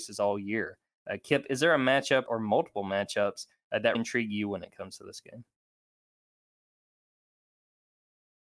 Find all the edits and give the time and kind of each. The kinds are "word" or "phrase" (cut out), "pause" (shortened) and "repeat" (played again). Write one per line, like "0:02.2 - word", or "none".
0:02.3 - word
0:03.9 - word